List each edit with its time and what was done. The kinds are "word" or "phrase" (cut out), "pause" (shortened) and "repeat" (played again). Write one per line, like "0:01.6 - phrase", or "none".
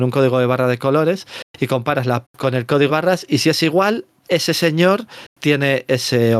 0:02.2 - word
0:02.9 - word
0:04.2 - word